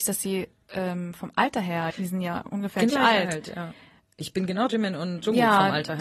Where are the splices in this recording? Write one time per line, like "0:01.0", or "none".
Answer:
0:01.9
0:02.9
0:04.7